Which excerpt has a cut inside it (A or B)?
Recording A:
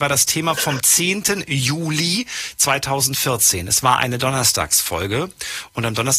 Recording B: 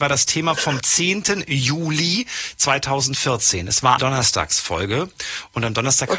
B